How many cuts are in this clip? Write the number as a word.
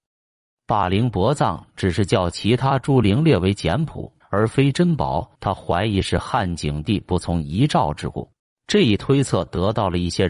three